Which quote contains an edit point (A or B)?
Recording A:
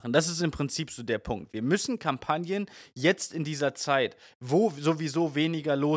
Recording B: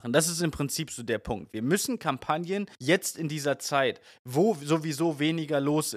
B